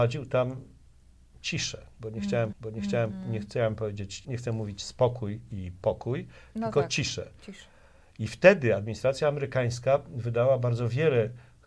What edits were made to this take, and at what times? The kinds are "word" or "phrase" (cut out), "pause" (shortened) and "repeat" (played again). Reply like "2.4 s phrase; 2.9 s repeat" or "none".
2.5 s repeat; 4.2 s word